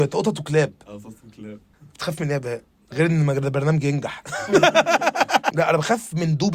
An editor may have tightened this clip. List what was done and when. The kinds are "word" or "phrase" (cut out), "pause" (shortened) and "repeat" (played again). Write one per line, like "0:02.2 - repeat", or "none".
none